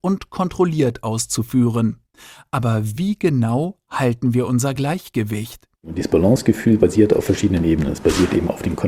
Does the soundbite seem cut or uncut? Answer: uncut